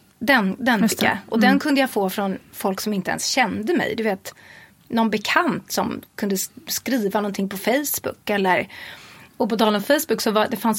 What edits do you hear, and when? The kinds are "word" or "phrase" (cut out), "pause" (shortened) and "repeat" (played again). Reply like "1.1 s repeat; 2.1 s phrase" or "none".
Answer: none